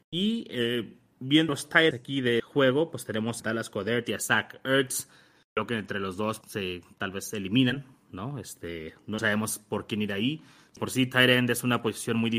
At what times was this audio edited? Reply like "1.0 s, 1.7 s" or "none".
1.5 s, 1.9 s, 2.4 s, 3.4 s, 6.4 s, 9.2 s, 10.8 s